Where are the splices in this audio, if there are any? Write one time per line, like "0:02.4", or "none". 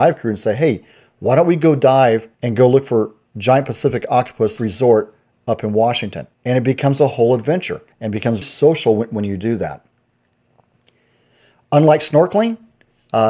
0:02.3
0:04.6
0:06.3
0:07.9
0:08.4